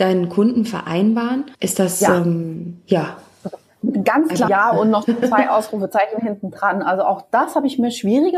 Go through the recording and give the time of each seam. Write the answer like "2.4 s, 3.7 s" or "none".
1.5 s, 4.5 s